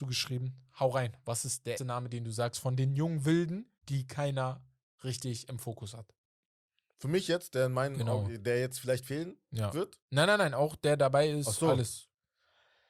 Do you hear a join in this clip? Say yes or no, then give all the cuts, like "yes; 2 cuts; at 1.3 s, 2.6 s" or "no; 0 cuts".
yes; 2 cuts; at 1.8 s, 3.8 s